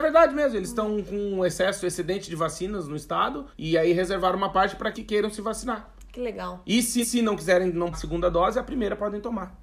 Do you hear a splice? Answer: yes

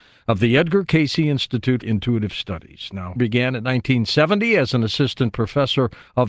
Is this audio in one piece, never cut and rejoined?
no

